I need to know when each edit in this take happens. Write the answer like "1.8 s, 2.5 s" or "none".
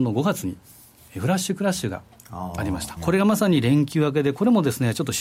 3.0 s